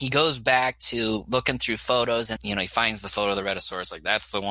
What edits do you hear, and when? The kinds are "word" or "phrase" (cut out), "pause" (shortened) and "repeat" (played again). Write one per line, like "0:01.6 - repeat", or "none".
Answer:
0:02.4 - word

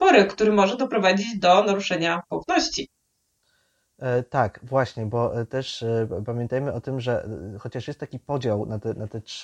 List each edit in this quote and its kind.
none

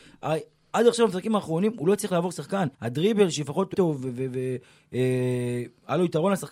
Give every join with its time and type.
0:02.7 - pause
0:03.7 - phrase

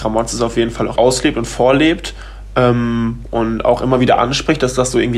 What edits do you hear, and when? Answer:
0:01.0 - word

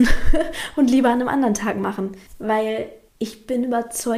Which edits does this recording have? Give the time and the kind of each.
0:02.3 - pause

